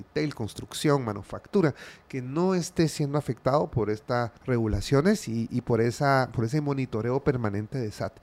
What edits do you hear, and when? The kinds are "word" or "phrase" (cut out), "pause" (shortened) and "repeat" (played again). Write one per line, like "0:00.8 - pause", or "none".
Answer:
0:04.4 - pause